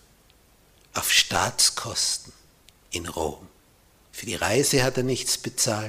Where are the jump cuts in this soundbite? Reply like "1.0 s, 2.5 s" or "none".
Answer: none

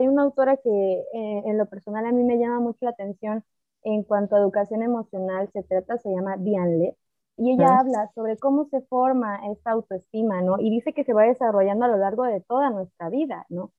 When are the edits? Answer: 7.4 s

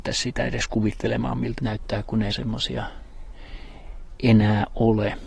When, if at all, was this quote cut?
1.6 s, 2.3 s

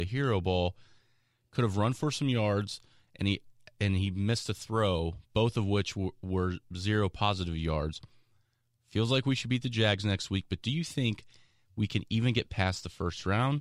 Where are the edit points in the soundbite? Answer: none

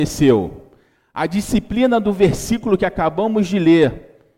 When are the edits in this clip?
none

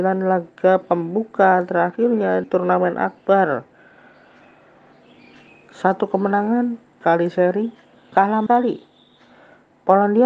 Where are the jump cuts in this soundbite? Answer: 2.4 s, 7.0 s, 8.1 s, 8.5 s

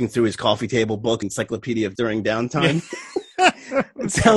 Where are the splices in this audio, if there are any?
1.2 s, 1.9 s

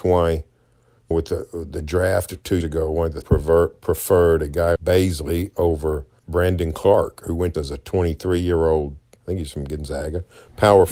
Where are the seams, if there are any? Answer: 1.1 s, 2.6 s, 3.2 s, 4.8 s, 6.2 s, 7.5 s, 9.2 s

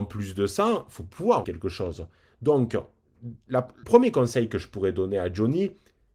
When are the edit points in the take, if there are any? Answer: 1.4 s, 3.8 s

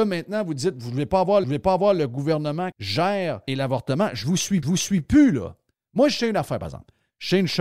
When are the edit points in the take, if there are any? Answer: 1.4 s, 2.7 s, 3.5 s, 4.6 s

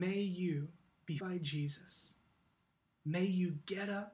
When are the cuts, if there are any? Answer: 1.2 s

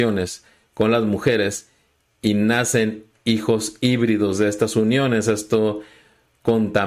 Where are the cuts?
none

